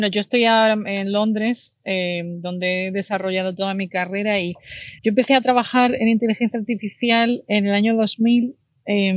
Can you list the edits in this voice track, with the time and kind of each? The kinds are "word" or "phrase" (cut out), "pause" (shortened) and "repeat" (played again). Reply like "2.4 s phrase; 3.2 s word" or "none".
5.0 s pause